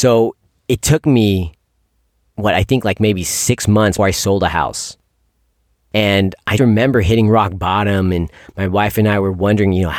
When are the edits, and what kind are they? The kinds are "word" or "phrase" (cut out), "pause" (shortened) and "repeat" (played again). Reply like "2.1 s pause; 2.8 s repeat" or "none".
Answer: 4.0 s word; 6.6 s word